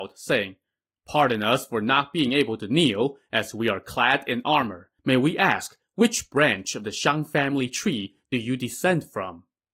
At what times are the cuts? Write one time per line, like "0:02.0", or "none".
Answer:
0:05.0